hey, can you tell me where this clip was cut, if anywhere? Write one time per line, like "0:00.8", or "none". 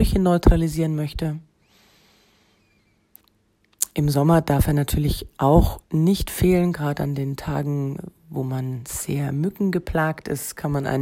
0:05.8